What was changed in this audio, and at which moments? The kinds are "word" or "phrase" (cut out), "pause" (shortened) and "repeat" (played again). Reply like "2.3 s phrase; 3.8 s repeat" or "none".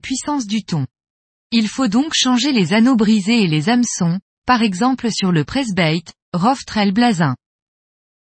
1.1 s pause